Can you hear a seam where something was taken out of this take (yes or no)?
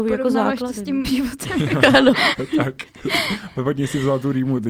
yes